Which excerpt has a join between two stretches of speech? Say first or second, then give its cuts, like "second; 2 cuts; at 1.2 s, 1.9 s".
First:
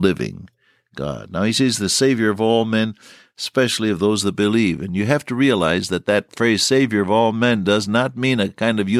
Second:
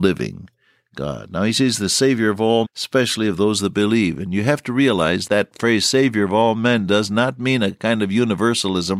second; 2 cuts; at 2.6 s, 5.3 s